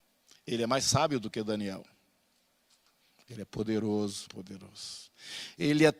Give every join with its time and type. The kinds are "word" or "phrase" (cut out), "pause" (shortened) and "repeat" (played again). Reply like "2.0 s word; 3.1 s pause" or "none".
4.3 s word